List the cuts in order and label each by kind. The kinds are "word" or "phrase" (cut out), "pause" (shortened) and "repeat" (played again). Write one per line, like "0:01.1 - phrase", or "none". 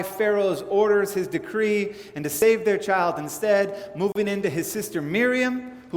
none